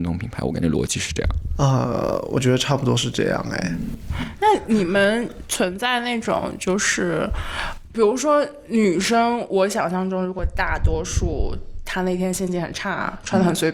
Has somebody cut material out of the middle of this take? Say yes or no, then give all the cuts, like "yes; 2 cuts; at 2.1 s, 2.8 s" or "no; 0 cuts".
no; 0 cuts